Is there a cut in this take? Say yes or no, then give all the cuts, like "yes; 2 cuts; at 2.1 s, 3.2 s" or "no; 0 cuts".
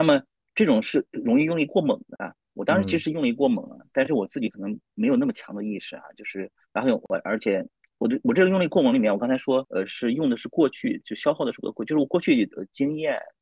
no; 0 cuts